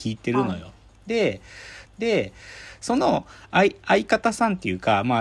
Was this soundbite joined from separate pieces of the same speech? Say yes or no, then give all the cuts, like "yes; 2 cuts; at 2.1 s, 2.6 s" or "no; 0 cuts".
yes; 1 cut; at 1.9 s